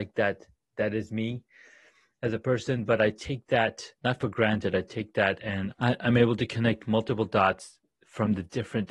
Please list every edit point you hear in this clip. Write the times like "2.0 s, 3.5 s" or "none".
4.0 s, 5.7 s